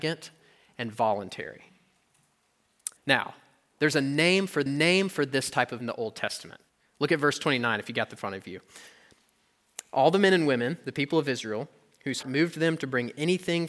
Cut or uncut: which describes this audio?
cut